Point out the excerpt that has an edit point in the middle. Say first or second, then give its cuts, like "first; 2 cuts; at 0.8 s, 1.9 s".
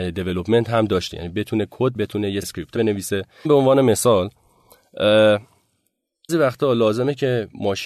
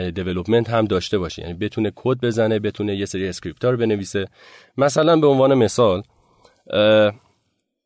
first; 6 cuts; at 1.1 s, 1.9 s, 2.4 s, 2.7 s, 3.4 s, 6.3 s